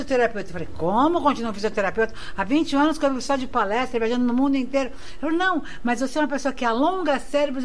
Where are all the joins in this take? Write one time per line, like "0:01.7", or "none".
none